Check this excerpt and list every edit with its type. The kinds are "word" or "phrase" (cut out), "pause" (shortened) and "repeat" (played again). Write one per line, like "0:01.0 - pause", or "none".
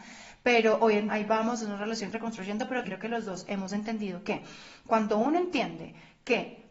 0:01.1 - word
0:02.1 - word
0:02.8 - word